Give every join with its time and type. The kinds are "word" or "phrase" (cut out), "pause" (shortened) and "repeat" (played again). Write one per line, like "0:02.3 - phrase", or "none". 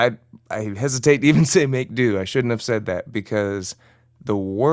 none